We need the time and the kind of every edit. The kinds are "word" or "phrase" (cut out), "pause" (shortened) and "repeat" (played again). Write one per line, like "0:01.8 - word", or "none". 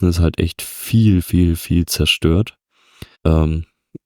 0:03.1 - pause